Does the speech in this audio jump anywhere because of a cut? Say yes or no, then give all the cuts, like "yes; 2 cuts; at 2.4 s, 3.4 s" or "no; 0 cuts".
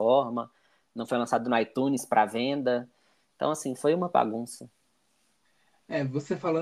no; 0 cuts